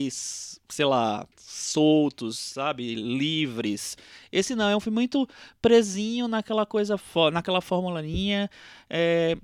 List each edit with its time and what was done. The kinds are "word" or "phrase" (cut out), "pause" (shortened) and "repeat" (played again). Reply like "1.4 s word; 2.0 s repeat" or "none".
1.3 s pause